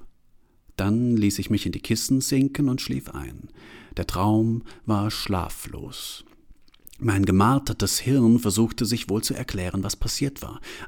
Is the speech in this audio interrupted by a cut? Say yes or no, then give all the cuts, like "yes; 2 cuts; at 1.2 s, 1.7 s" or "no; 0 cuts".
no; 0 cuts